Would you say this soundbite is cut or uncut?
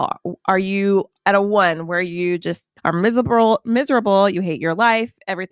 cut